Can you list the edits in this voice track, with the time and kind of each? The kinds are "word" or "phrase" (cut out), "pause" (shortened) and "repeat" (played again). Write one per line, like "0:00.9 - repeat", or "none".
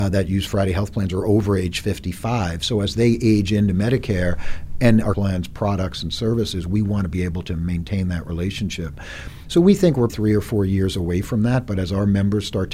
0:05.1 - phrase
0:10.1 - word